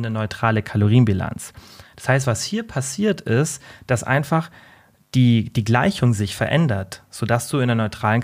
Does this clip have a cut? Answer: no; 0 cuts

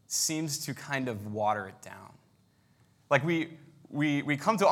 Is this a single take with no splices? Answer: yes; 0 cuts

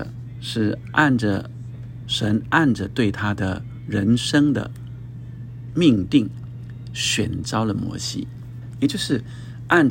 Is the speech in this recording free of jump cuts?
yes; 0 cuts

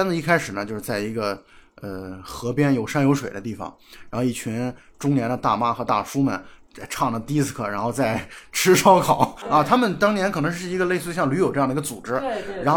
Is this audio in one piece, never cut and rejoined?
yes; 0 cuts

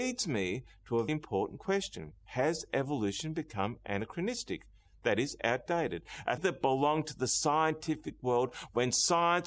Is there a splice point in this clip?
yes; 2 cuts; at 1.1 s, 6.4 s

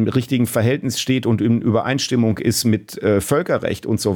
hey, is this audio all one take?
yes; 0 cuts

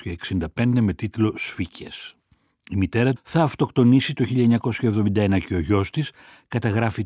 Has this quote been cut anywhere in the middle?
yes; 1 cut; at 3.2 s

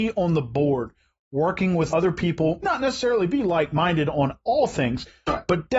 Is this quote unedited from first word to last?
no; 2 cuts; at 1.9 s, 2.6 s

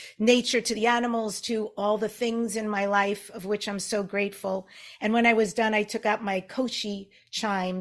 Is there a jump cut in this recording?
no; 0 cuts

